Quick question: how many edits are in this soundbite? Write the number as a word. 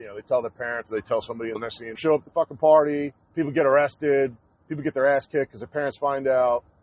four